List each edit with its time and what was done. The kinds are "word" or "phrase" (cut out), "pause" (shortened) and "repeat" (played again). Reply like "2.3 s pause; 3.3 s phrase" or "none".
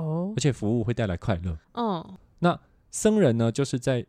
1.6 s pause